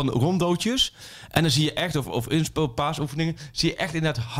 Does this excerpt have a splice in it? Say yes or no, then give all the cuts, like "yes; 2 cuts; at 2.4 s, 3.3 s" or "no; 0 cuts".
no; 0 cuts